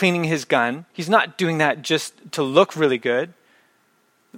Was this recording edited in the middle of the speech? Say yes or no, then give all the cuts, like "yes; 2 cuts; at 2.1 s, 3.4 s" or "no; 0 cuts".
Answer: yes; 1 cut; at 0.9 s